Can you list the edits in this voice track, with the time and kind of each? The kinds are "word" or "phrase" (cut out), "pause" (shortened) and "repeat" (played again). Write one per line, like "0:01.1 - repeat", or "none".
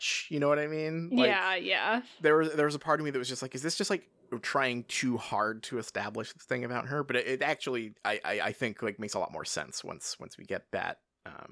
0:08.0 - pause

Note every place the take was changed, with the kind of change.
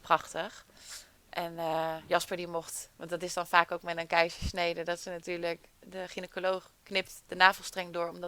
0:05.7 - pause

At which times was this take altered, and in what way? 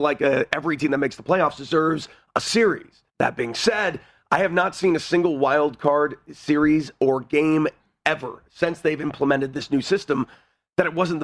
0:03.1 - pause

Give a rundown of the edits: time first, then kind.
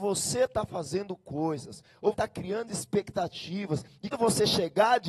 0:02.1 - word
0:04.1 - word

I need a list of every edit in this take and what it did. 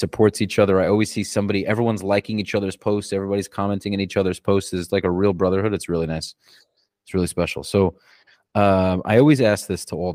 none

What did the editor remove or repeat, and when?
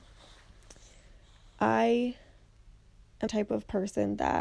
0:03.3 - word

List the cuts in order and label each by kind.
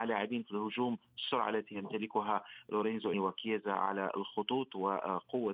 0:03.1 - word

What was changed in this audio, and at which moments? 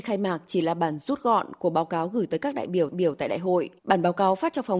0:02.9 - repeat
0:03.8 - pause

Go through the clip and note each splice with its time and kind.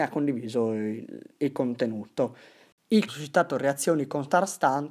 0:03.1 - phrase

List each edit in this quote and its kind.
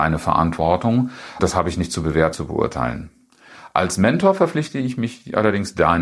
0:01.4 - word
0:02.3 - word

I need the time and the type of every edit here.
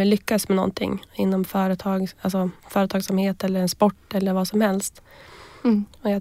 0:02.6 - pause

